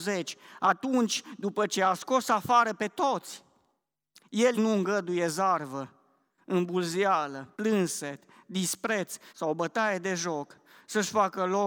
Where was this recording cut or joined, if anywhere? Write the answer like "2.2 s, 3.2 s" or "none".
4.5 s, 7.5 s, 9.3 s